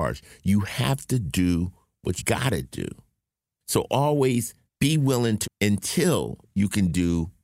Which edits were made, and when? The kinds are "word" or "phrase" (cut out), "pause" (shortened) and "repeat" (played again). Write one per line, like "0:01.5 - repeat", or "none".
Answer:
0:02.2 - word
0:04.7 - pause
0:05.4 - word